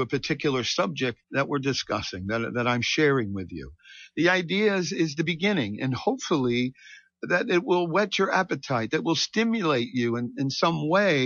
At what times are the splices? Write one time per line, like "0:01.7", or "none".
0:01.2